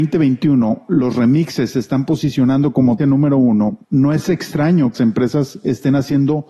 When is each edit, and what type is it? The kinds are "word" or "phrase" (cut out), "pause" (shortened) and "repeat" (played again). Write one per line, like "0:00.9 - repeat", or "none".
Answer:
0:03.0 - word
0:03.8 - pause
0:04.9 - word